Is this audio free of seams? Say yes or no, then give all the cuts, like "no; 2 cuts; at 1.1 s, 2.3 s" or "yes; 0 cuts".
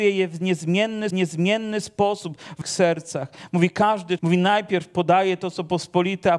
no; 3 cuts; at 1.1 s, 2.6 s, 4.2 s